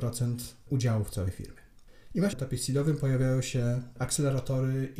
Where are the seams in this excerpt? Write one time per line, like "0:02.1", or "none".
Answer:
0:02.3

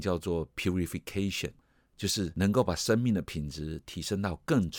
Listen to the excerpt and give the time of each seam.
none

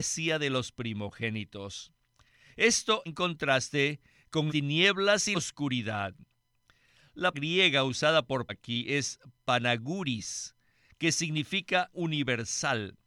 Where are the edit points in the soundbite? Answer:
0:03.1
0:04.5
0:05.3
0:07.3
0:08.5
0:11.9

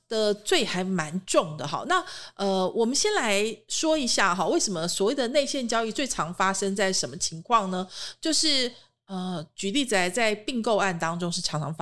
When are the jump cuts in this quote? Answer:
none

